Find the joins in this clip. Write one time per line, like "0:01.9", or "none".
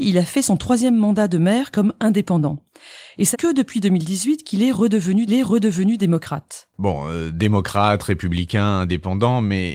0:03.3
0:05.3